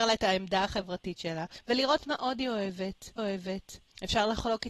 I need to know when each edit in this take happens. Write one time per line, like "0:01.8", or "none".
0:03.2

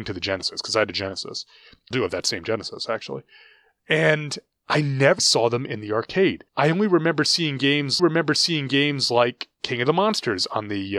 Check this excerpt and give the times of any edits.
0:01.9
0:05.2
0:06.5
0:08.0

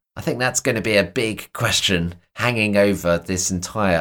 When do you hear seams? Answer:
none

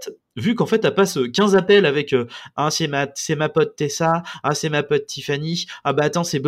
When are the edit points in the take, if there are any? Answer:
none

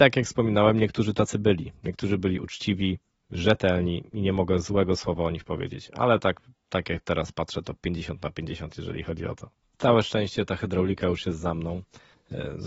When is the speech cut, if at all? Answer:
none

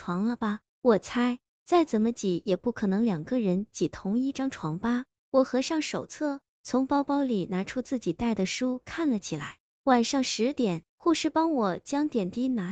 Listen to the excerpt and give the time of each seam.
0:10.9

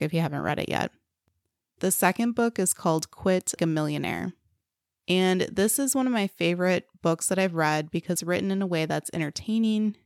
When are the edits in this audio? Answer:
0:03.6
0:08.2

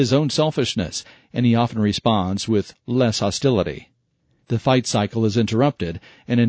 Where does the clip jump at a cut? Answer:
none

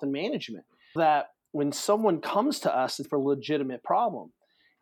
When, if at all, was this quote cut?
0:01.0
0:03.0

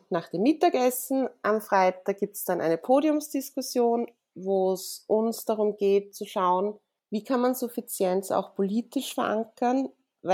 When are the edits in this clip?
none

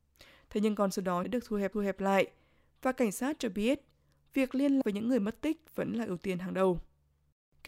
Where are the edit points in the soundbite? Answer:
0:01.2
0:01.7
0:04.8

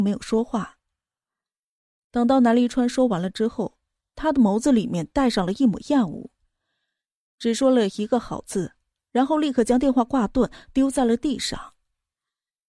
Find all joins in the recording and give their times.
none

